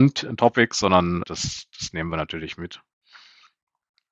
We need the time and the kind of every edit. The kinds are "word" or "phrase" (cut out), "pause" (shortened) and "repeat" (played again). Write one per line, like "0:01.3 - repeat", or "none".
0:01.2 - word